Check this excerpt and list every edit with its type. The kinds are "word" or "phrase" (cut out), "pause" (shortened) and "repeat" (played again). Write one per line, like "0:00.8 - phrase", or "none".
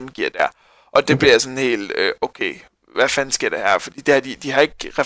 none